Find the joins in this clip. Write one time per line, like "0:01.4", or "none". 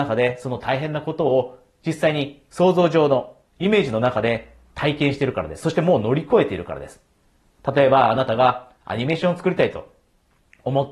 0:03.5
0:08.8